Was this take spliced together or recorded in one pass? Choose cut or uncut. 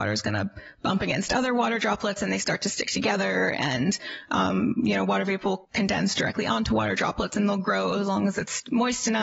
cut